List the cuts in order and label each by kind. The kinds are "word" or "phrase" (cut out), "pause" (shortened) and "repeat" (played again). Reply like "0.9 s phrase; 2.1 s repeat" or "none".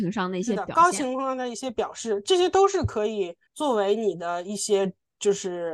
3.5 s pause